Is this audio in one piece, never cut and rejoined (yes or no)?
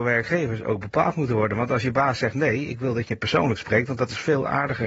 yes